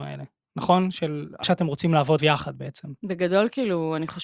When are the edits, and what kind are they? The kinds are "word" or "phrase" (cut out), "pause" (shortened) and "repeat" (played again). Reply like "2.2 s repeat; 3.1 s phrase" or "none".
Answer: 1.4 s word; 2.2 s word

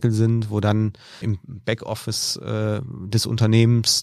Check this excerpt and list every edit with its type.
1.2 s word

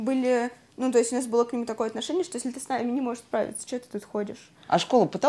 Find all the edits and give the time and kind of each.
none

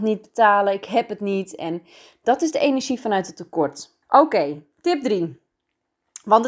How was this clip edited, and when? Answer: 4.0 s pause

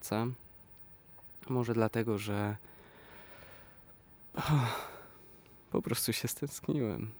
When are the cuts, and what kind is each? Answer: none

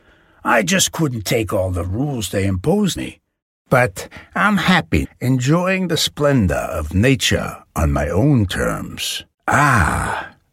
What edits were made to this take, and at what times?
3.0 s word; 5.0 s word; 9.3 s pause

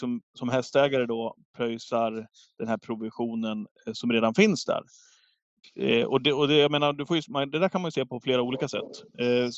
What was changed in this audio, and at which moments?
none

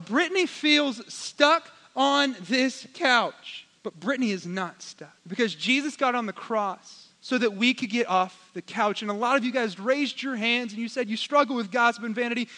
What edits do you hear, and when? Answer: 3.8 s pause; 5.2 s pause; 7.1 s pause

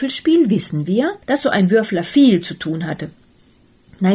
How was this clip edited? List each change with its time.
1.2 s pause

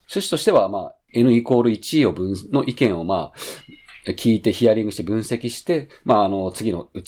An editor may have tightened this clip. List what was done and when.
1.0 s pause

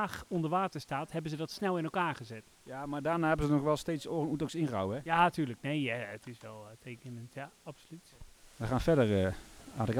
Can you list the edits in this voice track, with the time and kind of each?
none

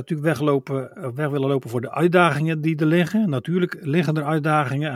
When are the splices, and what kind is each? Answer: none

